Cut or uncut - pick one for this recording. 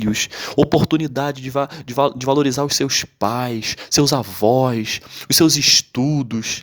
uncut